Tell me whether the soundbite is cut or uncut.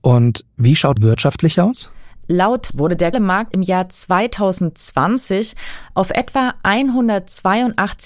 cut